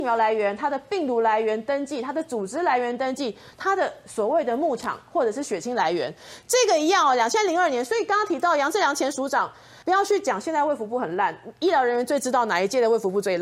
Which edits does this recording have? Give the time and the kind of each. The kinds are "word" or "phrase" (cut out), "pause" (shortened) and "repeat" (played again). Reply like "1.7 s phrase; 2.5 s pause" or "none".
9.8 s word